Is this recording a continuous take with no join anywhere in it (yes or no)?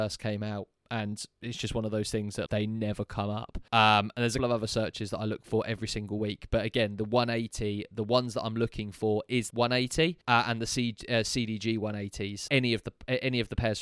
no